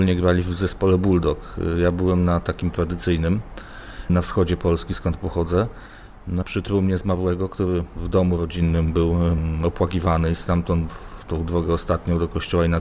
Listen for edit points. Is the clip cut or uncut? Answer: cut